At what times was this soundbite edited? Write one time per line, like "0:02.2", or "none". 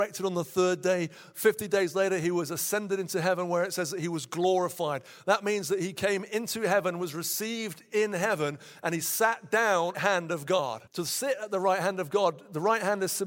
0:09.9
0:10.9